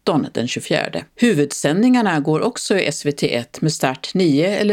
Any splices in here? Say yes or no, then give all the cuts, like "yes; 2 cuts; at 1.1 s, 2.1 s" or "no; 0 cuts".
yes; 1 cut; at 1.1 s